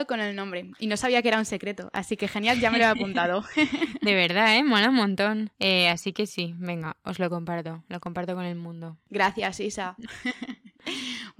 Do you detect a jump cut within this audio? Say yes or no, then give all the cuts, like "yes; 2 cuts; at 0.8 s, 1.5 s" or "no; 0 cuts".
yes; 2 cuts; at 5.5 s, 6.3 s